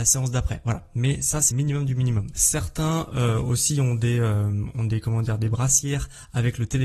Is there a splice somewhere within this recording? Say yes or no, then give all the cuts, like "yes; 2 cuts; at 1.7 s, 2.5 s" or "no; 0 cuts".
yes; 1 cut; at 1.5 s